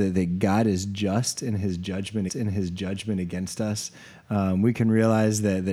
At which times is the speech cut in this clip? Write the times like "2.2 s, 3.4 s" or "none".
2.3 s